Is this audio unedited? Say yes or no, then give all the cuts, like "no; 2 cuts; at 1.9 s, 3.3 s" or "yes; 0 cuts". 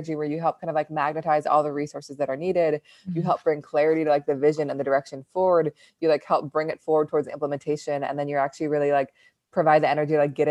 yes; 0 cuts